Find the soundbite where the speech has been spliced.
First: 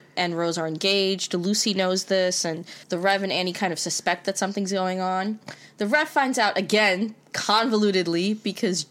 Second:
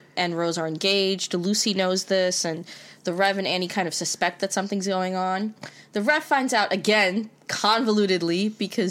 first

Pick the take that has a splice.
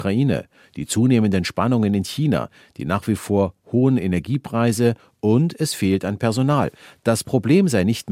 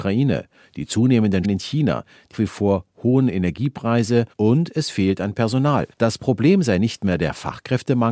second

